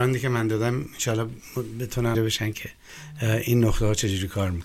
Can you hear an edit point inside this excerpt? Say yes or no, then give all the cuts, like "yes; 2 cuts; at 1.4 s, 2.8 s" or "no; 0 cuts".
yes; 1 cut; at 2.1 s